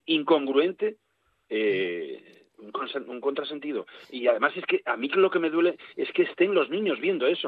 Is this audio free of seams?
yes; 0 cuts

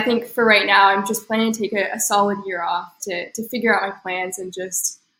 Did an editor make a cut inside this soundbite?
yes; 1 cut; at 3.0 s

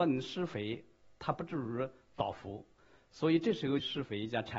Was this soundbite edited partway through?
no; 0 cuts

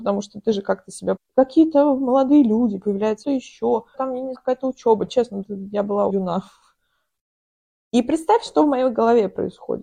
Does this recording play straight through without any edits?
no; 6 cuts; at 1.2 s, 3.2 s, 3.9 s, 4.3 s, 5.4 s, 6.1 s

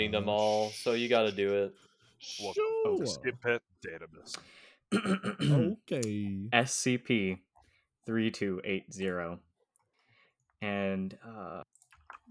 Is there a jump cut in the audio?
no; 0 cuts

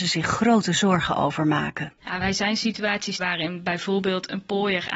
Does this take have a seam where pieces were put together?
yes; 2 cuts; at 2.0 s, 3.2 s

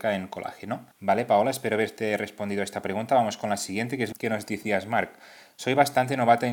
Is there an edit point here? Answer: yes; 3 cuts; at 0.9 s, 4.1 s, 4.6 s

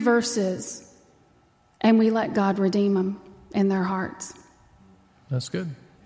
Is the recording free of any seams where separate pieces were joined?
yes; 0 cuts

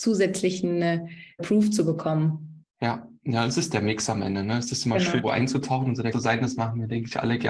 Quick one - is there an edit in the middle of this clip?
yes; 4 cuts; at 1.4 s, 2.7 s, 5.2 s, 6.1 s

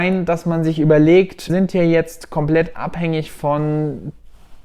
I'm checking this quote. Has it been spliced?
yes; 1 cut; at 1.5 s

